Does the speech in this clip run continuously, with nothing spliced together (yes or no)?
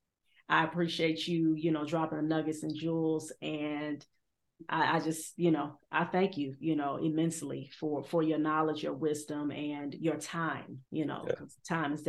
no